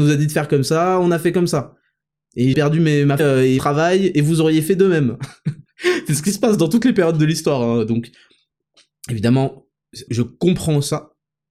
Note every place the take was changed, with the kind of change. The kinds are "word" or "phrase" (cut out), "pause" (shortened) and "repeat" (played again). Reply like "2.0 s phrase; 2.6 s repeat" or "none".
2.5 s word; 3.2 s word; 3.6 s word; 10.1 s word